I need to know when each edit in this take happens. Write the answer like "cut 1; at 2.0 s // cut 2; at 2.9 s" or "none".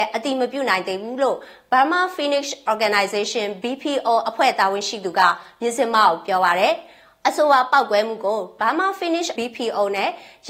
cut 1; at 9.4 s